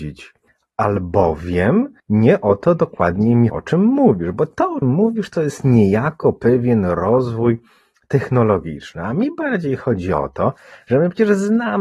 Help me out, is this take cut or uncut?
cut